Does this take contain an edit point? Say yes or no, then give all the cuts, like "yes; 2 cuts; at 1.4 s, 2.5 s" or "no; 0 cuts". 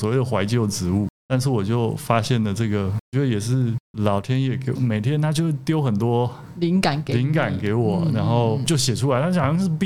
yes; 2 cuts; at 3.9 s, 4.8 s